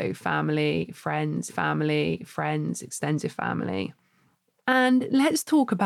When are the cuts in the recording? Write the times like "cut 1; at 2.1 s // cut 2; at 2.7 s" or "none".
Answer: cut 1; at 1.5 s

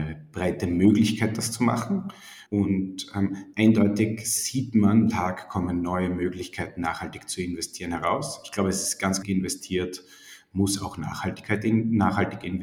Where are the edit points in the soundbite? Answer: cut 1; at 2.5 s // cut 2; at 5.1 s // cut 3; at 9.2 s

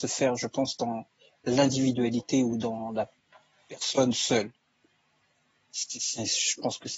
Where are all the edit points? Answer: none

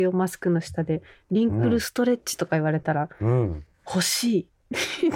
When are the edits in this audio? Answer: none

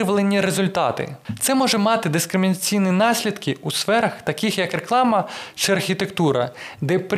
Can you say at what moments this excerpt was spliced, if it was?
none

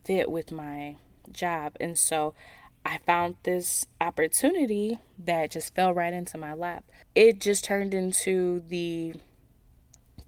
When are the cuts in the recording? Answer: none

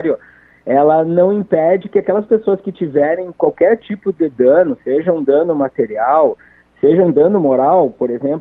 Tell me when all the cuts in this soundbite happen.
none

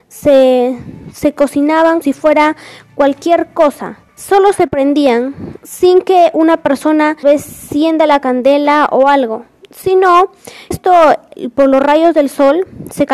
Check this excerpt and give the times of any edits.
cut 1; at 2.0 s // cut 2; at 4.1 s // cut 3; at 7.2 s // cut 4; at 10.7 s

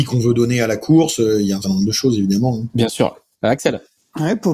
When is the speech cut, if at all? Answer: cut 1; at 1.6 s

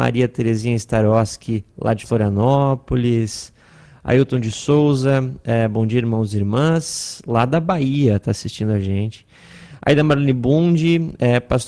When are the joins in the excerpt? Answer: none

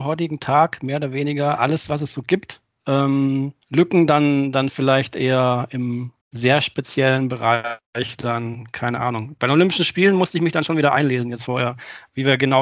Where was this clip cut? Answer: cut 1; at 3.6 s // cut 2; at 6.2 s

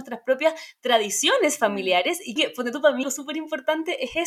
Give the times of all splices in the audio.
cut 1; at 2.4 s // cut 2; at 3.0 s

